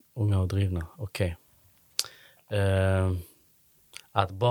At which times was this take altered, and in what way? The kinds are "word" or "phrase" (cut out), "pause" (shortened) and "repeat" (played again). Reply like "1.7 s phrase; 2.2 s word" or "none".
none